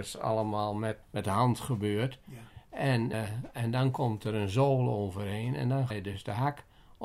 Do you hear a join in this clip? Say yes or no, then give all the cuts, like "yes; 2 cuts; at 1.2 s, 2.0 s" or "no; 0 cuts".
yes; 3 cuts; at 1.0 s, 3.1 s, 5.9 s